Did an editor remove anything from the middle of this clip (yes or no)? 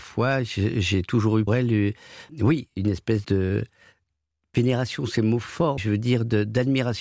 yes